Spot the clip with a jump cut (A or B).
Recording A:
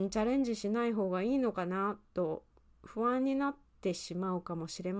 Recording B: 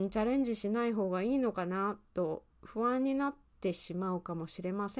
B